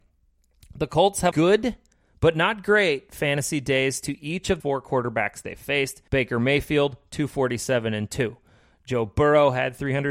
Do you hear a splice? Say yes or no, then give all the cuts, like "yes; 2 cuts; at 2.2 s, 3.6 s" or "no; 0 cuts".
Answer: yes; 3 cuts; at 1.3 s, 4.6 s, 6.1 s